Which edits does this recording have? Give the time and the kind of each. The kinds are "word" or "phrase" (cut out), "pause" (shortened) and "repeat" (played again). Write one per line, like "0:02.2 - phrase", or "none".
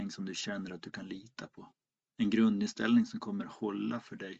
none

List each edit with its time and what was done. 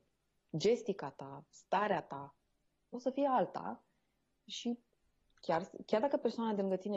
none

